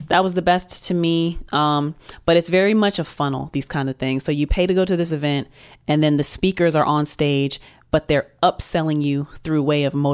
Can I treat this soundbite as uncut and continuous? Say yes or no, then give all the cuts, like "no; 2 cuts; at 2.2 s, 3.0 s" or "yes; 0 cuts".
yes; 0 cuts